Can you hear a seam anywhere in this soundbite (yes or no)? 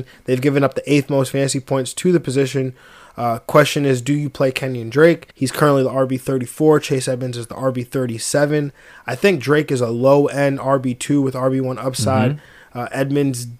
yes